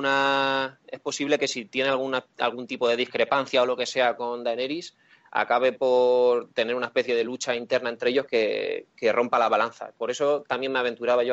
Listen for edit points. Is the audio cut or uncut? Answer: uncut